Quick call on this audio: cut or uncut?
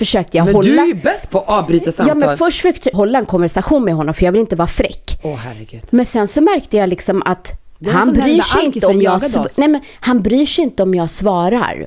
cut